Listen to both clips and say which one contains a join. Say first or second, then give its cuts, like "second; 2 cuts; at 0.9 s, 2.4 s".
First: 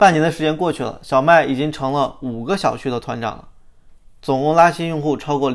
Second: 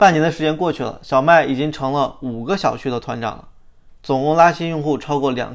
second; 1 cut; at 4.0 s